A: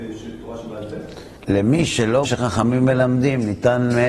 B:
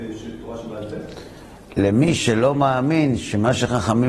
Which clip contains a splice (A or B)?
A